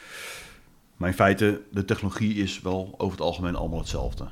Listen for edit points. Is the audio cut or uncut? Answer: uncut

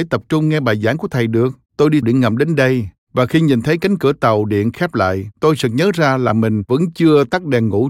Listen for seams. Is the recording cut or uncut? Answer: cut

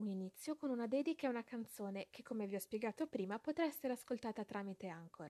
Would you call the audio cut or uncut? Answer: uncut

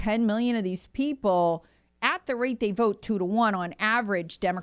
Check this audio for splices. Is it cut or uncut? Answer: uncut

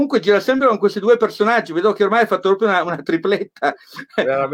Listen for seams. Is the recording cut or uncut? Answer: uncut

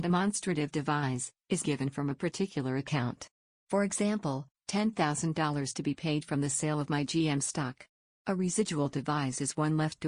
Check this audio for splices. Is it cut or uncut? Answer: cut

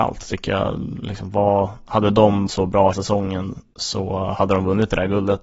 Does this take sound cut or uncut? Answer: cut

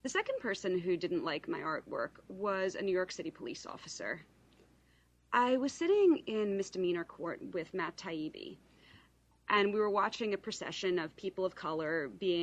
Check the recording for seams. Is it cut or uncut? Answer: uncut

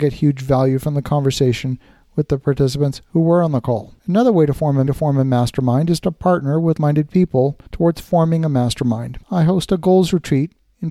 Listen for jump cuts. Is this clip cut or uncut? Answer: cut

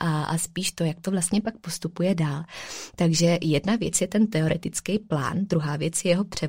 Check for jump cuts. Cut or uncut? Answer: uncut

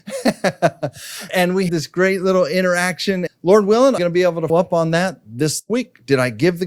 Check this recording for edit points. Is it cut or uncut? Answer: cut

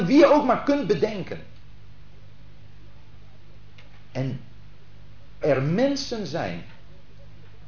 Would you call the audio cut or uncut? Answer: cut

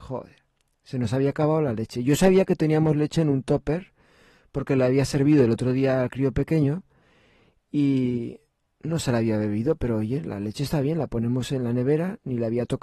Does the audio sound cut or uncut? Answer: uncut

